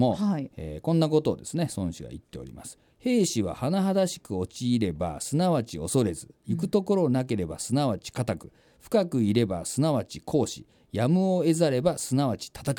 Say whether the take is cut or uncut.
uncut